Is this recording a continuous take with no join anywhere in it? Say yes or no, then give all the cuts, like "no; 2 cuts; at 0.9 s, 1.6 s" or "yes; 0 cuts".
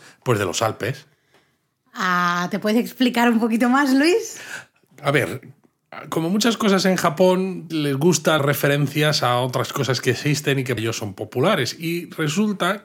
no; 3 cuts; at 7.7 s, 8.4 s, 10.8 s